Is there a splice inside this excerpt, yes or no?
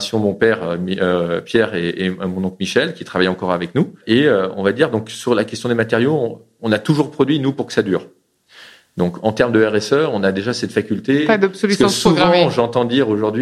no